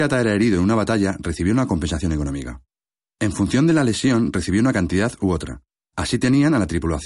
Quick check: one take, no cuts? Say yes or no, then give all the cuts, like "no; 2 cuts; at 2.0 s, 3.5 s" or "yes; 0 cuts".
yes; 0 cuts